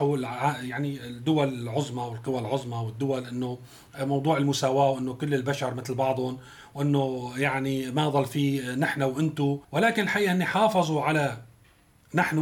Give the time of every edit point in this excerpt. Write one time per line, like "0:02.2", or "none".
0:09.6